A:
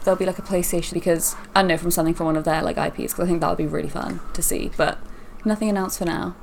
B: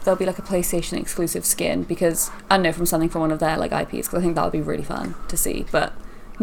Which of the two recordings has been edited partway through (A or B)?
A